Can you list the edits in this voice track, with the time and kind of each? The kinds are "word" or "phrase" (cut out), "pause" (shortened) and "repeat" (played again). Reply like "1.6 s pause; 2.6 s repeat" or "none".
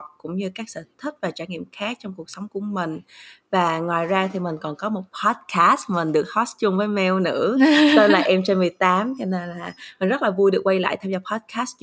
none